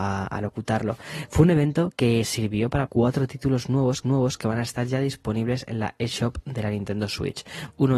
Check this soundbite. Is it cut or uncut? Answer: cut